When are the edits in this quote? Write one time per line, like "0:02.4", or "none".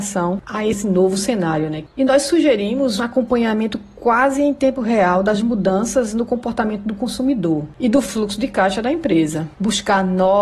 0:03.0